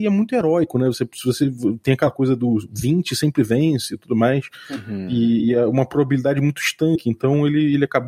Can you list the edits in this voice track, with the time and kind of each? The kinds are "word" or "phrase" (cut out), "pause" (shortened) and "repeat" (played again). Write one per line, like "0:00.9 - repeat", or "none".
none